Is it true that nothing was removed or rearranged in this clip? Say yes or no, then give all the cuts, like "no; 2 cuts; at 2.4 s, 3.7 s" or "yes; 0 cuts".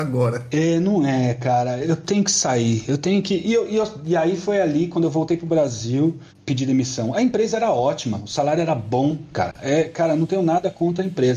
yes; 0 cuts